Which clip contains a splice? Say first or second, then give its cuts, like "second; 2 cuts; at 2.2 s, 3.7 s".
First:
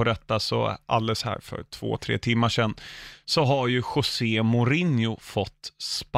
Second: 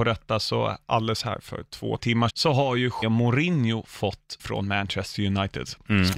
second; 4 cuts; at 2.0 s, 2.3 s, 3.0 s, 4.4 s